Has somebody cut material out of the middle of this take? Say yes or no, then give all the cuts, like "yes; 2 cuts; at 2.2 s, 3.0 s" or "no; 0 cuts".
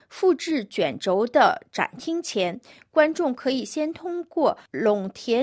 no; 0 cuts